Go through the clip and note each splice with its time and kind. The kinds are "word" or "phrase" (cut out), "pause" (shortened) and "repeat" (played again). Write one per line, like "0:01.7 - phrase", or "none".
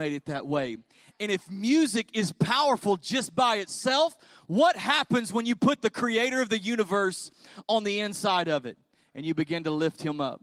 none